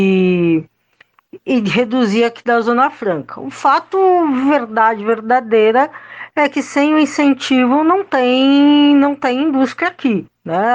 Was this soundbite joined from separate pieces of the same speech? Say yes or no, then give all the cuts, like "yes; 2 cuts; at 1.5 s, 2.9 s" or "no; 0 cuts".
no; 0 cuts